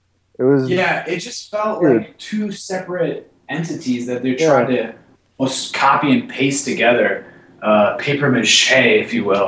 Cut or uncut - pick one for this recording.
uncut